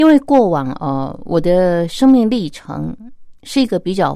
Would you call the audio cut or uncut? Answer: uncut